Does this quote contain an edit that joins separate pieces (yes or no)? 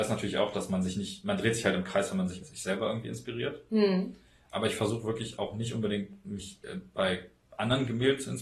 yes